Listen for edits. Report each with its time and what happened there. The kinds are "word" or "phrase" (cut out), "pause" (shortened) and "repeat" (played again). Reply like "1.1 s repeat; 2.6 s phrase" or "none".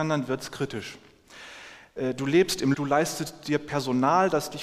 2.7 s word